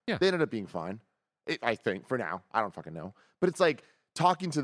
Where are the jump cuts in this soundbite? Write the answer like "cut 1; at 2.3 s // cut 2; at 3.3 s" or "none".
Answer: none